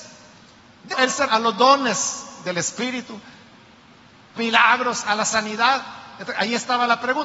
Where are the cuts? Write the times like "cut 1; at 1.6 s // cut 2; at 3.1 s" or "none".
cut 1; at 0.9 s // cut 2; at 1.3 s // cut 3; at 4.4 s